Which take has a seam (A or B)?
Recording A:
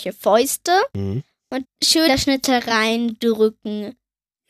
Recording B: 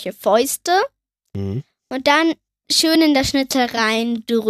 A